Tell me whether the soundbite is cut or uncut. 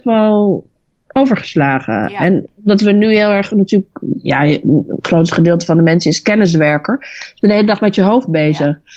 uncut